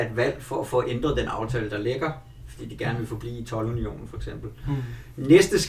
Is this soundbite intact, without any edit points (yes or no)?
yes